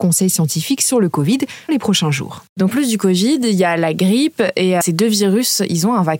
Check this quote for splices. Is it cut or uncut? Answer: cut